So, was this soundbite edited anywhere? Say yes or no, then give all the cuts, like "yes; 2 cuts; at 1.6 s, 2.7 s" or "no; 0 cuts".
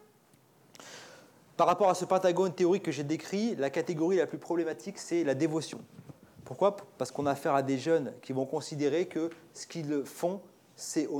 no; 0 cuts